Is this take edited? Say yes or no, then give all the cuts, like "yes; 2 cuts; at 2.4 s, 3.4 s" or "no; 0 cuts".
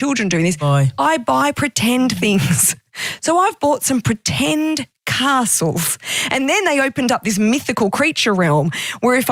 no; 0 cuts